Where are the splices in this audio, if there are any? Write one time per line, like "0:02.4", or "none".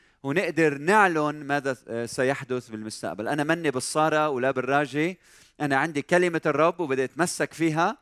none